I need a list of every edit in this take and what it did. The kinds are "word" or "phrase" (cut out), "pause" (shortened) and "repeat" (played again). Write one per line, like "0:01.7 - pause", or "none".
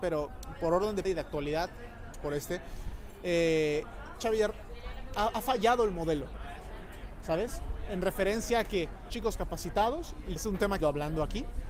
0:01.0 - word
0:02.1 - word
0:04.2 - word
0:05.1 - word
0:09.1 - phrase
0:10.4 - word
0:10.8 - phrase